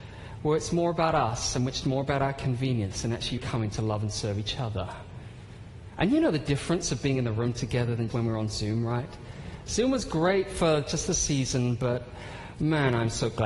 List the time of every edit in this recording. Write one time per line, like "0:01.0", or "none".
0:03.4
0:08.1